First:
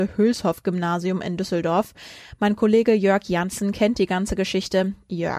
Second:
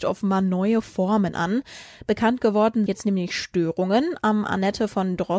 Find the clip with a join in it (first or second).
second